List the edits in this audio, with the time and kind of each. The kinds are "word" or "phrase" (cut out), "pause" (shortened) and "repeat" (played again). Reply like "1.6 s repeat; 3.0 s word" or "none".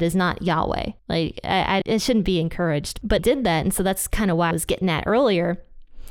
1.0 s pause; 1.8 s word; 3.2 s word; 4.5 s word